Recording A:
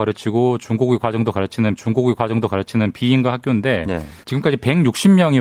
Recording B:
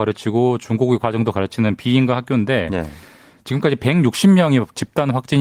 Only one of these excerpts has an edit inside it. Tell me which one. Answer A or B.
A